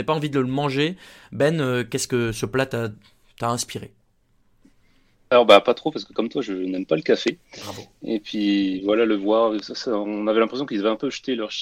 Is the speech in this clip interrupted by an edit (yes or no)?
no